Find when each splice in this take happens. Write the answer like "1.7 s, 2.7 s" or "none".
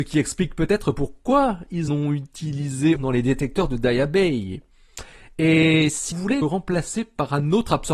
1.9 s, 3.0 s, 6.1 s, 6.4 s